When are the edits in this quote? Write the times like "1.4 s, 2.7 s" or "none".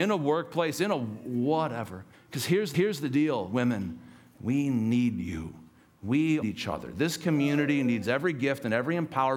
2.1 s, 2.7 s, 4.4 s, 6.4 s